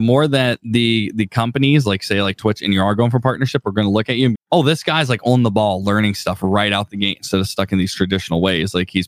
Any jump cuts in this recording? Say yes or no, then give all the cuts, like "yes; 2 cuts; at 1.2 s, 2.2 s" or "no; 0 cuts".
yes; 1 cut; at 4.3 s